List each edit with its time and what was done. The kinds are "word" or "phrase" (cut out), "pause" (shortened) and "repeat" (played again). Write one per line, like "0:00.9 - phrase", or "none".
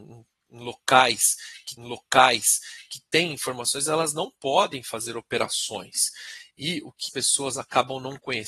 0:01.8 - repeat
0:07.1 - word